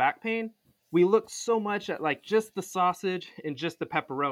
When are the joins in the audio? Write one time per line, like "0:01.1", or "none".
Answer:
none